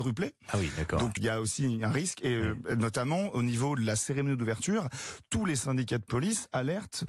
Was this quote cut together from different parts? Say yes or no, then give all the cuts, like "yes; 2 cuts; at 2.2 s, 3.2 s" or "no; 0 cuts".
yes; 1 cut; at 1.2 s